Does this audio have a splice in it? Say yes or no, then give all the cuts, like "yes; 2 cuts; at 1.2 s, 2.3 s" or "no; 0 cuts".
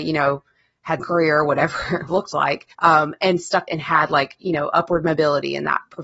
yes; 4 cuts; at 1.0 s, 2.1 s, 2.7 s, 3.7 s